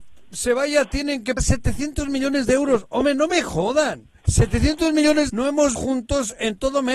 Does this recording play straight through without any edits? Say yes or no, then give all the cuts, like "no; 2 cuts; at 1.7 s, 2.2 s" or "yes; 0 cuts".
no; 4 cuts; at 1.4 s, 4.2 s, 5.3 s, 5.7 s